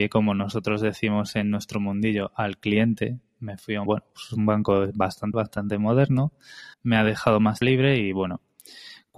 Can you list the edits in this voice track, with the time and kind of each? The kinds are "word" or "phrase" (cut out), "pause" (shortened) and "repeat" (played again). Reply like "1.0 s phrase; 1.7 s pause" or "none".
3.9 s word; 5.3 s word; 6.7 s pause; 7.6 s word